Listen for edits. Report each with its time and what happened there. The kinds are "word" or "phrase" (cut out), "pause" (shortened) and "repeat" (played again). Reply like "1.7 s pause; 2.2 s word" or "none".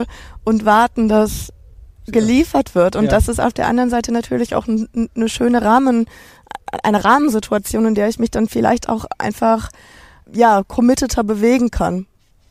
none